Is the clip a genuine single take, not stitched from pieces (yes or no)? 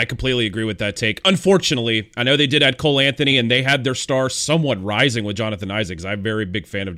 yes